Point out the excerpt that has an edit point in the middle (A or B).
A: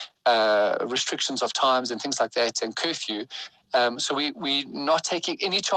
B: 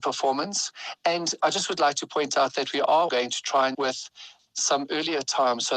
B